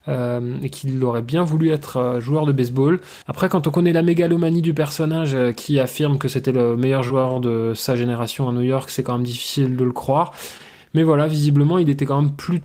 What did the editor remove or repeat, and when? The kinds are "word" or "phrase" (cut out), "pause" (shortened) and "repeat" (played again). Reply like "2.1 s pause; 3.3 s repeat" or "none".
3.2 s pause